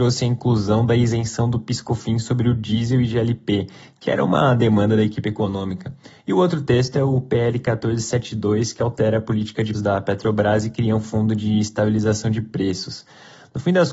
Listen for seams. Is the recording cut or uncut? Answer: cut